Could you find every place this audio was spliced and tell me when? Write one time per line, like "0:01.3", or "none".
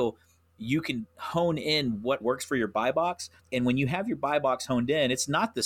0:02.2
0:03.4

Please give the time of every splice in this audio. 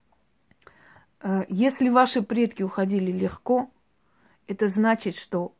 none

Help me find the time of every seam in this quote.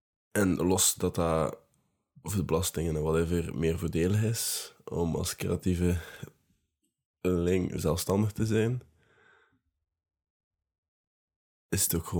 none

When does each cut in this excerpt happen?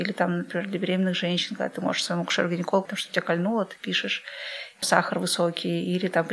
0:02.8
0:04.8

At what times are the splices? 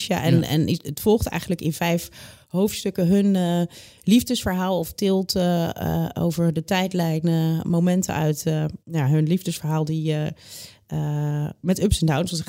0:08.8

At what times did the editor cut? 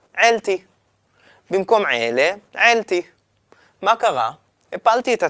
none

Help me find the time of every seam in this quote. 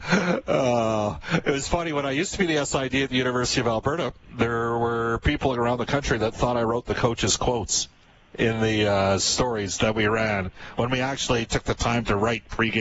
none

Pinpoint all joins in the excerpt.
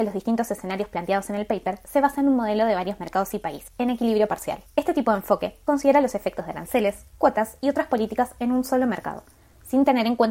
none

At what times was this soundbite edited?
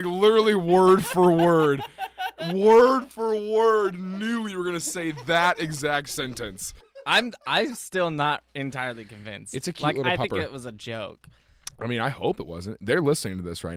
none

